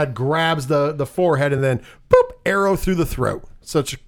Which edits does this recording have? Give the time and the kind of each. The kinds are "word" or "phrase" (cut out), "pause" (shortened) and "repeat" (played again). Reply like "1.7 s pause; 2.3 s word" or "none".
none

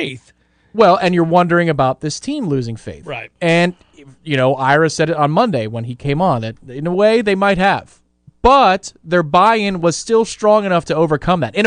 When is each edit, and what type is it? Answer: none

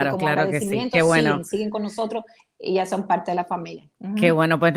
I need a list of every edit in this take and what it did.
none

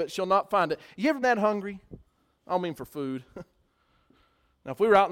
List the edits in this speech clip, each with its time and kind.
1.2 s word; 2.1 s pause

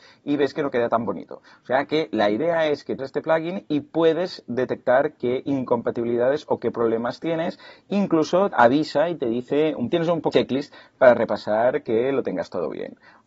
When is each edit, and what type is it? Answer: 3.0 s word; 8.5 s word; 9.9 s word; 10.3 s word

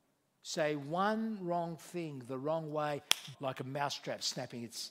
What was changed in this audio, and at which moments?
3.3 s phrase

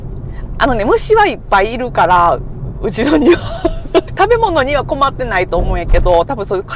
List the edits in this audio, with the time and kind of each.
4.1 s phrase

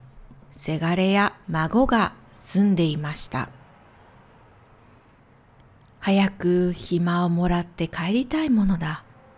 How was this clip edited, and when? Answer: 1.4 s pause

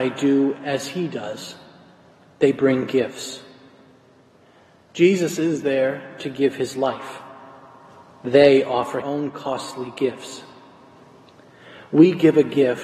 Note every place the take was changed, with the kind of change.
9.0 s phrase

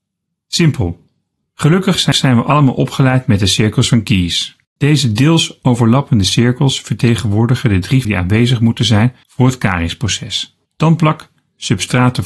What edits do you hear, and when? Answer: 2.1 s repeat; 4.6 s pause; 8.0 s word; 9.2 s pause; 10.6 s pause

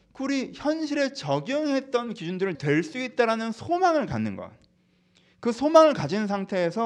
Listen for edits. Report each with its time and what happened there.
2.5 s phrase

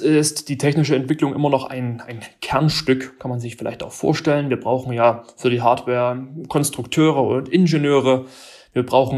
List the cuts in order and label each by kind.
none

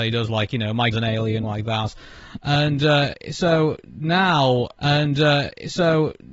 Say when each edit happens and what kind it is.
0.9 s word; 1.4 s phrase; 4.8 s repeat

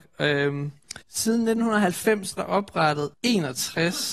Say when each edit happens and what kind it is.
1.0 s pause; 2.4 s word; 3.1 s pause

